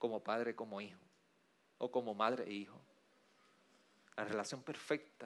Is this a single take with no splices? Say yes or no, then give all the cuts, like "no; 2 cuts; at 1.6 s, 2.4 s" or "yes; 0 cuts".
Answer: yes; 0 cuts